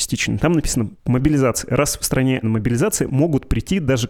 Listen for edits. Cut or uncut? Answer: cut